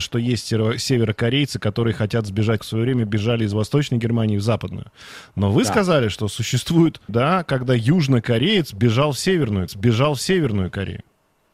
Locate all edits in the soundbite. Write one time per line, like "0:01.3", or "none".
0:02.6
0:07.1
0:09.7